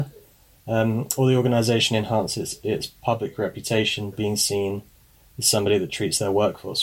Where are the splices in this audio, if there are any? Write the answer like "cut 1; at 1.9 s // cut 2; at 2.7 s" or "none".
cut 1; at 4.1 s